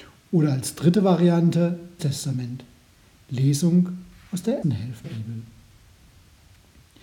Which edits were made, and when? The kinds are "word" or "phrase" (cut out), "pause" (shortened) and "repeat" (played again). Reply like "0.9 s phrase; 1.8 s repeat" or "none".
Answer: 2.0 s word; 4.6 s word; 5.0 s word